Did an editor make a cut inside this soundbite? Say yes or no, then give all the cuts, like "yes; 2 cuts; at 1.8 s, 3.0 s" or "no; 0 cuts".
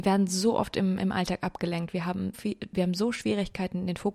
yes; 1 cut; at 2.3 s